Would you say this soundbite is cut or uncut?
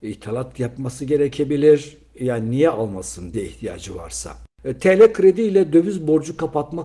cut